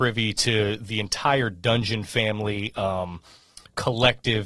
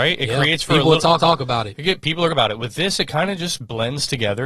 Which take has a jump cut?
second; 2 cuts; at 1.2 s, 2.3 s

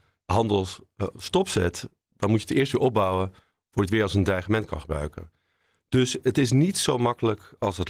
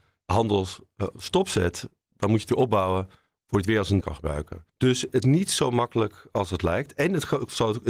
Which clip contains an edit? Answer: second; 4 cuts; at 2.5 s, 4.0 s, 4.7 s, 5.2 s

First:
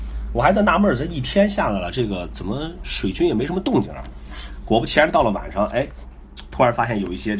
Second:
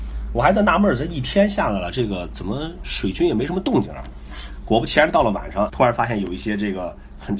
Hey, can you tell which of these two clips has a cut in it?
second; 1 cut; at 5.7 s

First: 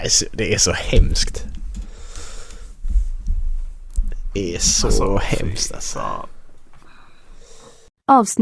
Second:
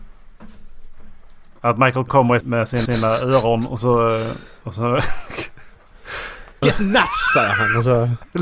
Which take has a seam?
second; 4 cuts; at 2.1 s, 2.4 s, 2.9 s, 6.6 s

